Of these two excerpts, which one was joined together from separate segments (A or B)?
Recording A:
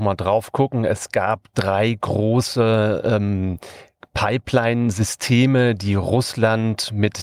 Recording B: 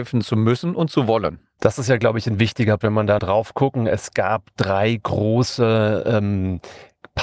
B